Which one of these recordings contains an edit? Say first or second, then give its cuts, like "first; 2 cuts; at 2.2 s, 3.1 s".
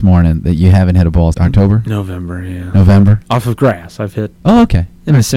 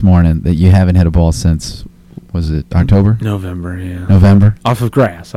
first; 1 cut; at 1.3 s